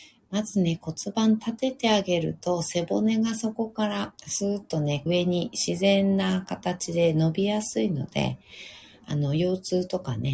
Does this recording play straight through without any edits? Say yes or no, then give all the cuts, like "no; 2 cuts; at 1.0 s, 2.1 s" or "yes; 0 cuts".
no; 2 cuts; at 4.2 s, 5.1 s